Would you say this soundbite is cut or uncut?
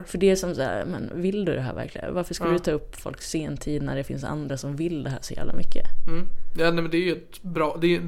uncut